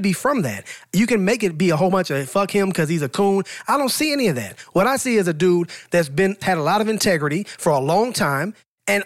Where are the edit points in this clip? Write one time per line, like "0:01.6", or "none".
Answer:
0:06.4

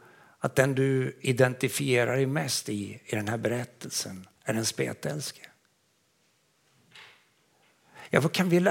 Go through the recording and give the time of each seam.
0:04.4

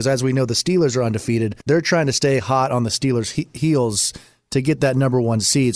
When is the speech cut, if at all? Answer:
0:01.6

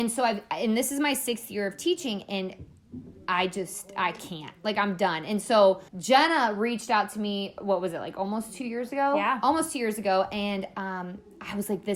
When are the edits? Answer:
0:05.9

